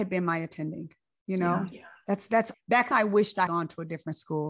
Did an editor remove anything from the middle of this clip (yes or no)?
yes